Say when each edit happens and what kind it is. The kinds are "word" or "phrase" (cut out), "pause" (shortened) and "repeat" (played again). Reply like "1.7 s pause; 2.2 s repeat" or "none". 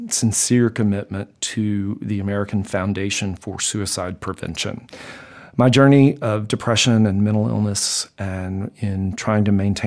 none

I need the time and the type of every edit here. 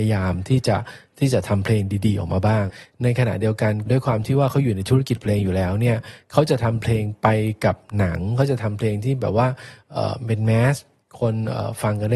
3.9 s phrase

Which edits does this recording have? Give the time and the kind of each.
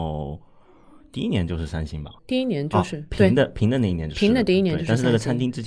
2.2 s pause

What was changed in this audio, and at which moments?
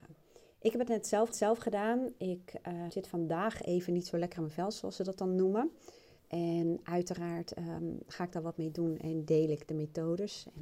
1.3 s repeat; 2.9 s word; 6.2 s pause

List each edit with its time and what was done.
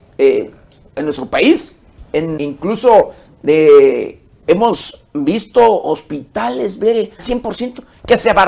2.4 s word; 7.2 s word

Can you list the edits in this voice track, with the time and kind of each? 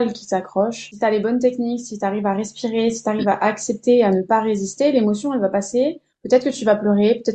none

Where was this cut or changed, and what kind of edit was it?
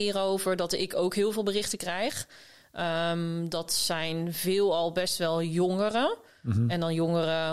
none

